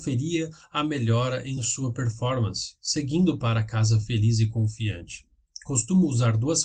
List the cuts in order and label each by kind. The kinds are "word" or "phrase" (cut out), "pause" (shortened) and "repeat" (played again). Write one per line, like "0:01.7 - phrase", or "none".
none